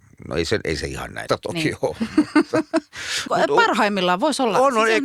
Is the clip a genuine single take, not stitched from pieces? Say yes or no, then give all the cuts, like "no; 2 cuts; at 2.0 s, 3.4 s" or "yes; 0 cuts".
no; 2 cuts; at 1.3 s, 3.3 s